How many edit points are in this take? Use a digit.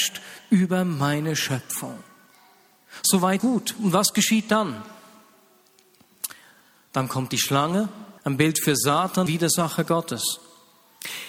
3